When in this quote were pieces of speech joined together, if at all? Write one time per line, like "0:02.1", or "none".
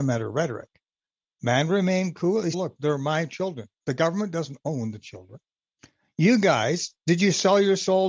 0:02.5